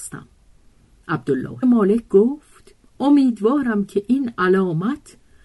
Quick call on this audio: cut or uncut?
cut